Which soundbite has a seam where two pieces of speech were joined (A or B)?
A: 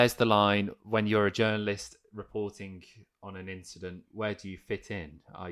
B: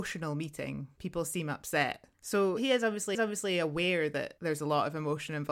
B